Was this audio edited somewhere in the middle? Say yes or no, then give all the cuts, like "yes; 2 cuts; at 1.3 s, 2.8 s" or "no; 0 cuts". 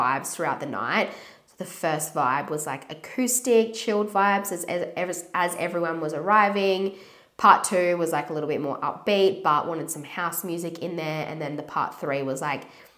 no; 0 cuts